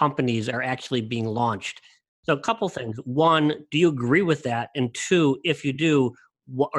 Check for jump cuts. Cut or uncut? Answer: uncut